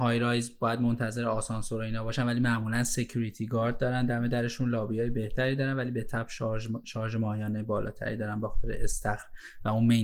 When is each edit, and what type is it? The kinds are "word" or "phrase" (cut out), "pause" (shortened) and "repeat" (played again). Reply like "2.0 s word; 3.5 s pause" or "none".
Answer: none